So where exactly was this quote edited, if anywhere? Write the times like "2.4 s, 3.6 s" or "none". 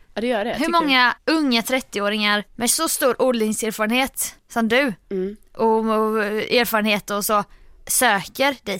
5.0 s